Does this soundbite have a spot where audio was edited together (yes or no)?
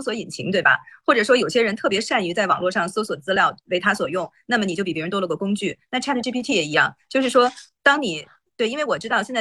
no